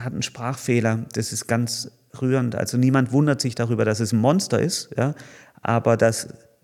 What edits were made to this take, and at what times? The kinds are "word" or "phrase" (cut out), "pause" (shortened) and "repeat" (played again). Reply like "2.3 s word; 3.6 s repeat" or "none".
none